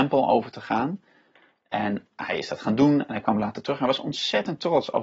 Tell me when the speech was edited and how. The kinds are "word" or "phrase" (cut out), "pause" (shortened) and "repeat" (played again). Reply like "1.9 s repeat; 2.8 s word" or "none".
none